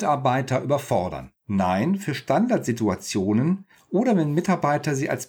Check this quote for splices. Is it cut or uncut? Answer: cut